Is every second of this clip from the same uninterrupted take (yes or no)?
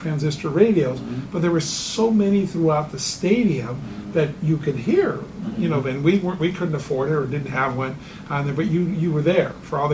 yes